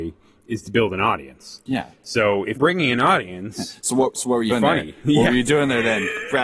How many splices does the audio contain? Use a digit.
2